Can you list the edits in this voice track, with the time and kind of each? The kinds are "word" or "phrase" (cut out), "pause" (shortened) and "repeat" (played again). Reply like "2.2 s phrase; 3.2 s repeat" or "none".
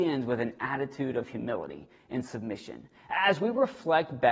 none